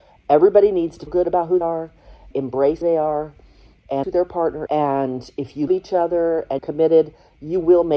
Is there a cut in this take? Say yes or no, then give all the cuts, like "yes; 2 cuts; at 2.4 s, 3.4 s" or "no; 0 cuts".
yes; 8 cuts; at 1.1 s, 1.6 s, 2.3 s, 2.8 s, 4.0 s, 4.7 s, 5.7 s, 6.6 s